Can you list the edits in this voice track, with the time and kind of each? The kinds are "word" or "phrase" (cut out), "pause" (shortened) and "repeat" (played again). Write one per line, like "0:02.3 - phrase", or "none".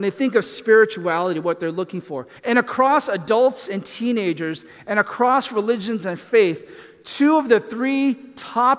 0:02.4 - pause